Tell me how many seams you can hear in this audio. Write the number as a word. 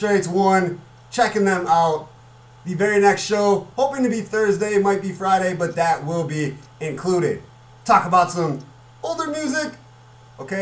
zero